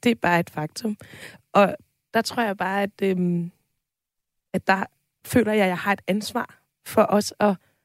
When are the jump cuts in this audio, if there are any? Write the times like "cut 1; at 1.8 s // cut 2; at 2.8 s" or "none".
none